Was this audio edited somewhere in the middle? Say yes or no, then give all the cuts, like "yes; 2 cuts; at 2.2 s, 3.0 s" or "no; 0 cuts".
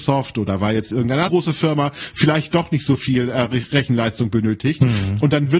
yes; 1 cut; at 1.3 s